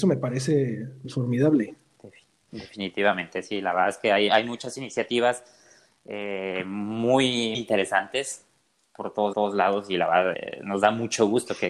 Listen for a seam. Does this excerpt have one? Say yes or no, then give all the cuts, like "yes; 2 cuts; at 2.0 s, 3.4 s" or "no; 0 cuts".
yes; 5 cuts; at 1.0 s, 4.3 s, 7.5 s, 9.3 s, 10.3 s